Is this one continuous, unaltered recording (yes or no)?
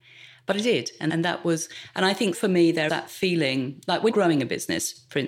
no